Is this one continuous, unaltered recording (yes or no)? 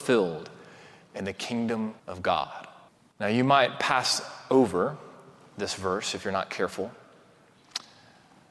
no